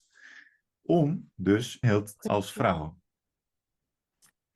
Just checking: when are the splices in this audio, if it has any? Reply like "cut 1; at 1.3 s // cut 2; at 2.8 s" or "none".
cut 1; at 1.8 s // cut 2; at 2.3 s